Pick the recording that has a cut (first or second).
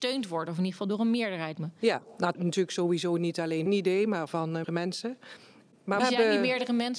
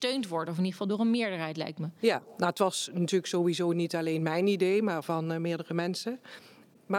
first